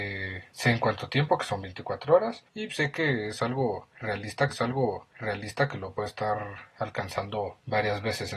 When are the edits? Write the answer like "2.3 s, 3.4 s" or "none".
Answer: 4.5 s